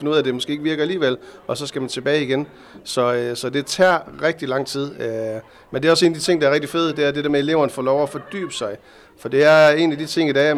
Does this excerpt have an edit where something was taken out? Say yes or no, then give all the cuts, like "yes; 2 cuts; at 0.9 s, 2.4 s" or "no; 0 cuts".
no; 0 cuts